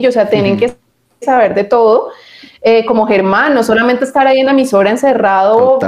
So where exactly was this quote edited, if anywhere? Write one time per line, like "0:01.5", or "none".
none

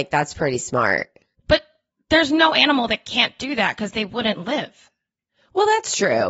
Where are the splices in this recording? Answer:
0:01.3

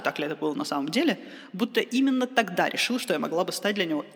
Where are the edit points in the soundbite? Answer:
none

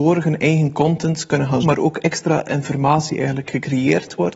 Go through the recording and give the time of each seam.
0:01.6

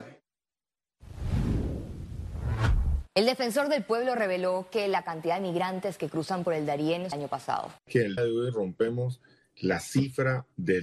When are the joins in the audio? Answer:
0:03.1
0:07.1
0:07.8
0:08.2

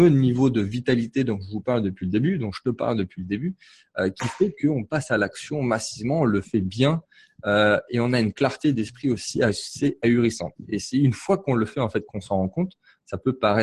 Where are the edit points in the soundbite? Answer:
none

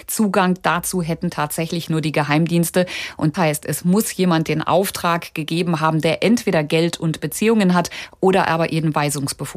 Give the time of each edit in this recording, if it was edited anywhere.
0:03.3

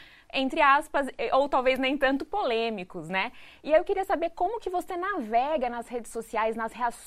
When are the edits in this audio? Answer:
none

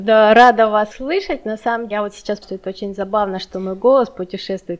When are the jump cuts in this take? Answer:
0:00.9
0:01.9
0:02.4

